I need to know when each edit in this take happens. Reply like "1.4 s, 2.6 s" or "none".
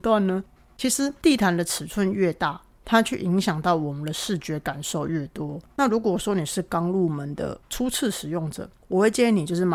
5.7 s

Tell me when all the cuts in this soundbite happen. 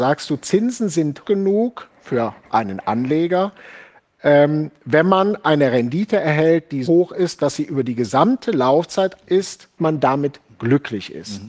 1.2 s, 6.8 s, 9.2 s, 9.8 s

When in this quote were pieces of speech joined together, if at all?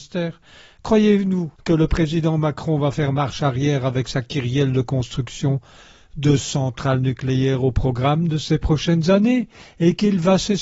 1.6 s

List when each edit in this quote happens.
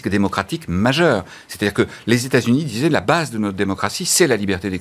none

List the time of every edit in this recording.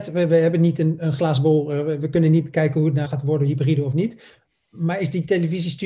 3.0 s

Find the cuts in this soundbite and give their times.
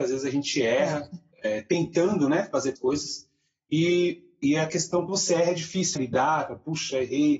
2.8 s, 5.1 s, 6.0 s

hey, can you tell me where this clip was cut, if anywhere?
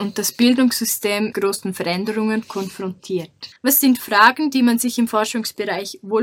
1.3 s, 3.6 s

